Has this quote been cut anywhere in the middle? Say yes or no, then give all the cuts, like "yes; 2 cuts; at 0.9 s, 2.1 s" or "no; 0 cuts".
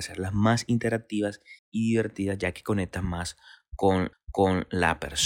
yes; 2 cuts; at 1.6 s, 4.1 s